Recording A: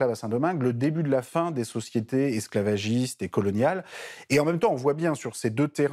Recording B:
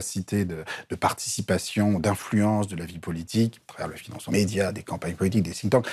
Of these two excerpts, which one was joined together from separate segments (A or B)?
B